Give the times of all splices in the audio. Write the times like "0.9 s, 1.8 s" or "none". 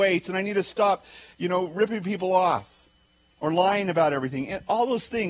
none